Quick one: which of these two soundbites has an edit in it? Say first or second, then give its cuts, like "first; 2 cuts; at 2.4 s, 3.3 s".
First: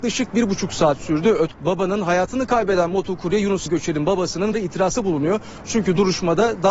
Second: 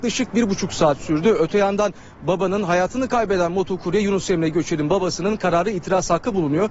first; 4 cuts; at 1.5 s, 3.7 s, 4.5 s, 5.0 s